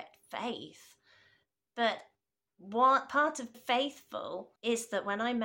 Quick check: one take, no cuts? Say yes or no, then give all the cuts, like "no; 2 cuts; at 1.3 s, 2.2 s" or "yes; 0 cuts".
no; 3 cuts; at 2.2 s, 3.5 s, 4.6 s